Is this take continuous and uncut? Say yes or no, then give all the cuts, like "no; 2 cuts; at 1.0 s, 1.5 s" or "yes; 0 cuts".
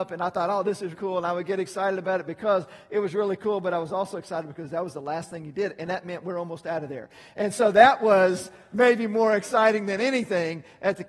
no; 1 cut; at 0.9 s